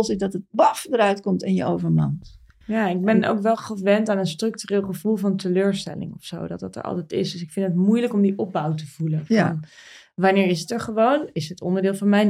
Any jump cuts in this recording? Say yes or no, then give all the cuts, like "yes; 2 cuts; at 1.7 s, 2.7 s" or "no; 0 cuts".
no; 0 cuts